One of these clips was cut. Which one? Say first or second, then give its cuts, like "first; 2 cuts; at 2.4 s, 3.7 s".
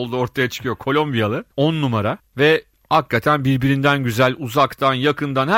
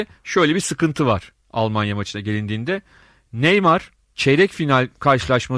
first; 2 cuts; at 1.5 s, 2.3 s